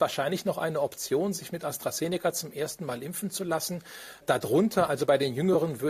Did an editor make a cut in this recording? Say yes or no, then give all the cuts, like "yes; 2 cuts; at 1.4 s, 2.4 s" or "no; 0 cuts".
no; 0 cuts